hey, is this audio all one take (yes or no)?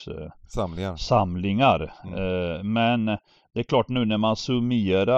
yes